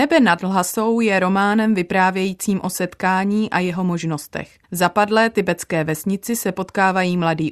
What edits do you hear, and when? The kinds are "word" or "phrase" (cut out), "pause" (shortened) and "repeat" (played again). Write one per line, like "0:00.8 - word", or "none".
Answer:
0:04.6 - pause